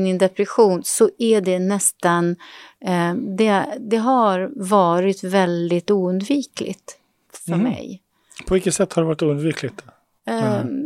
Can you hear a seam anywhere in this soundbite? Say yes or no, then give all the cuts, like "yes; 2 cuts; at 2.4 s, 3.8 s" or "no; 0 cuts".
no; 0 cuts